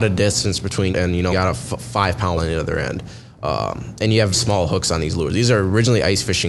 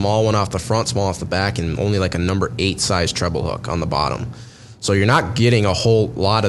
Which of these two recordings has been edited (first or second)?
first